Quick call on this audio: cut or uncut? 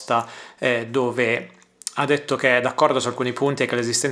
uncut